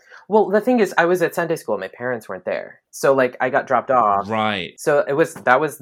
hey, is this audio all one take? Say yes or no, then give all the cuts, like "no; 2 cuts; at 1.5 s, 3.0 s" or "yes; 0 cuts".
yes; 0 cuts